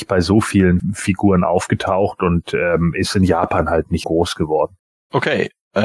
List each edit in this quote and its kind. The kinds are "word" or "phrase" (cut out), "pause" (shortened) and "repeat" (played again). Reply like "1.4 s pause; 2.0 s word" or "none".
4.0 s word